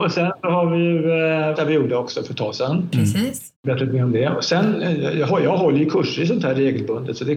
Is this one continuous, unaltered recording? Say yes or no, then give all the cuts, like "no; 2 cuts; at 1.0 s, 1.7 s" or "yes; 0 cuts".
no; 2 cuts; at 1.5 s, 3.5 s